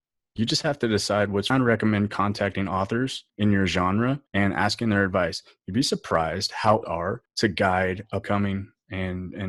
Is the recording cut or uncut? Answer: cut